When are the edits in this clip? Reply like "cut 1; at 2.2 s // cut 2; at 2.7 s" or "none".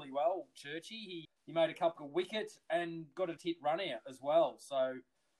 cut 1; at 1.2 s // cut 2; at 2.0 s // cut 3; at 3.4 s